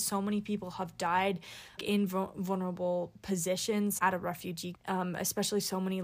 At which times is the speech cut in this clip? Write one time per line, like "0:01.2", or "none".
0:01.8
0:04.0
0:04.7